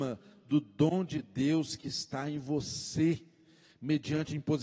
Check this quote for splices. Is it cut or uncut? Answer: uncut